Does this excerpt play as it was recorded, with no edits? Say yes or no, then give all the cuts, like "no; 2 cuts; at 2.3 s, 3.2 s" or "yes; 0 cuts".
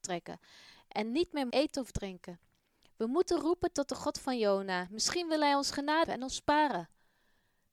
no; 2 cuts; at 1.5 s, 6.1 s